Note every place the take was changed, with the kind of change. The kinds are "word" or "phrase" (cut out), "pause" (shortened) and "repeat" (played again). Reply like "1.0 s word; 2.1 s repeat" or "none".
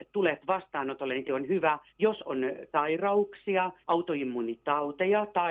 1.2 s word; 1.9 s pause; 2.7 s word; 3.8 s pause